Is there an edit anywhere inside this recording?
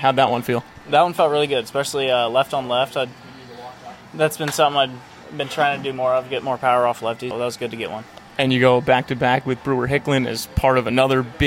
yes; 1 cut; at 7.3 s

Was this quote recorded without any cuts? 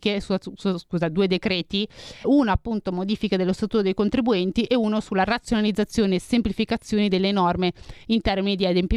no; 1 cut; at 2.2 s

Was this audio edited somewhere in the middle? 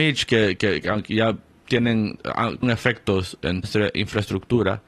yes; 2 cuts; at 2.6 s, 3.6 s

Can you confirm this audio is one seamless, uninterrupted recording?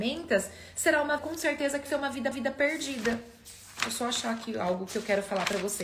no; 3 cuts; at 1.2 s, 1.9 s, 2.3 s

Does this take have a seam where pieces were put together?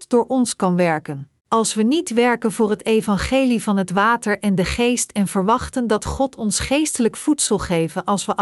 yes; 1 cut; at 1.4 s

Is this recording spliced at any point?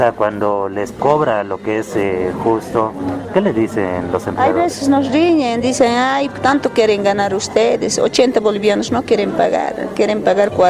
no; 0 cuts

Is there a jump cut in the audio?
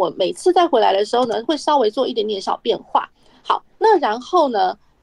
no; 0 cuts

